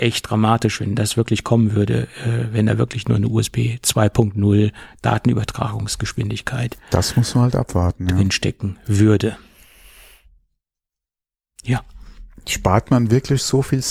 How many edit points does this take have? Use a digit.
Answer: 0